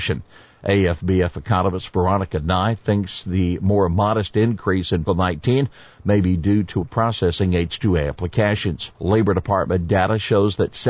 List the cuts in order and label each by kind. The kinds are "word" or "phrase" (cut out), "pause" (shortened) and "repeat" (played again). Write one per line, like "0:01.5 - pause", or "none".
0:05.1 - word
0:06.8 - phrase
0:08.9 - pause